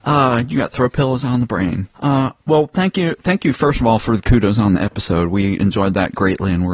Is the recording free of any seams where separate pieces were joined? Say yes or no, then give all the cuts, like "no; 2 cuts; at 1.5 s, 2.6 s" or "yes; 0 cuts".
no; 1 cut; at 1.9 s